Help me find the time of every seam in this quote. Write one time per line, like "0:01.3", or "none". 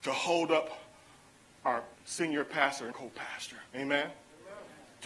0:01.9
0:02.9
0:03.7